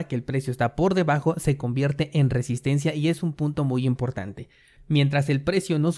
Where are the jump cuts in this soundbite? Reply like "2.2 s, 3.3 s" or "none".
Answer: none